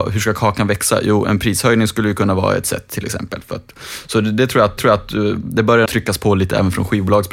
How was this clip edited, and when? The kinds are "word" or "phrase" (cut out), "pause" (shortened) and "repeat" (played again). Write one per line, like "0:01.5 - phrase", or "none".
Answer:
0:04.8 - repeat
0:05.9 - word

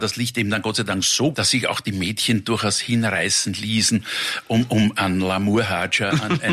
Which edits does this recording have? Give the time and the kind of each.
0:01.3 - word

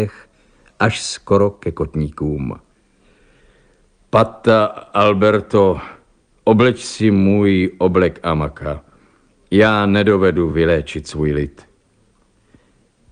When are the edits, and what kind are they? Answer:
none

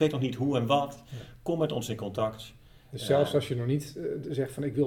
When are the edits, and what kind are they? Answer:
none

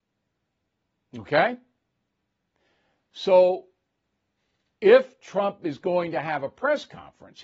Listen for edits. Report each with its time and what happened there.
none

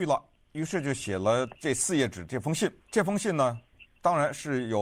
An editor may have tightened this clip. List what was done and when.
0:02.8 - pause

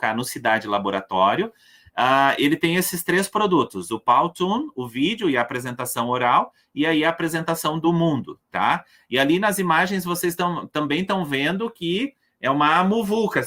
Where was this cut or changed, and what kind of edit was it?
none

